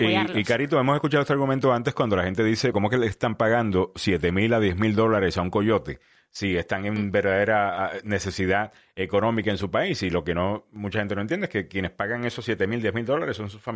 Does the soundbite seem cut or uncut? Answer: cut